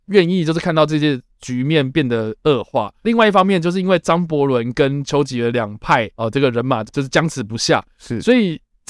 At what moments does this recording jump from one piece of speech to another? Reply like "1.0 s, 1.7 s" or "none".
6.1 s